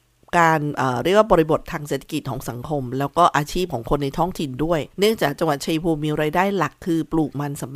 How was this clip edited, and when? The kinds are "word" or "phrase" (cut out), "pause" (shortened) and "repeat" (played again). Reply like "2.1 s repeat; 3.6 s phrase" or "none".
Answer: 4.9 s pause